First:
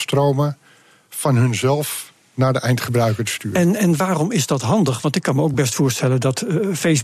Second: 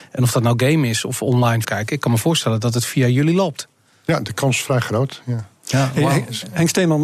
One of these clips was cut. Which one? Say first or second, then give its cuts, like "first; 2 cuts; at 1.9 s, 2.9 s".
second; 1 cut; at 1.6 s